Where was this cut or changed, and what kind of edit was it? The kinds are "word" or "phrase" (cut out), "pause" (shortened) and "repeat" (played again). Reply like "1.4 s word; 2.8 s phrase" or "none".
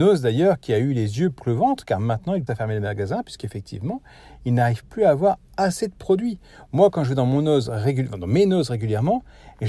1.4 s word; 2.5 s word